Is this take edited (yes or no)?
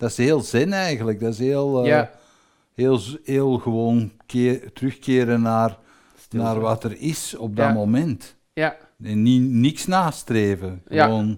no